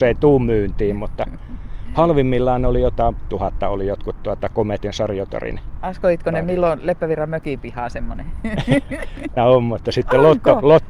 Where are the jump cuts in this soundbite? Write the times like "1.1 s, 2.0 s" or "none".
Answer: 3.3 s, 9.4 s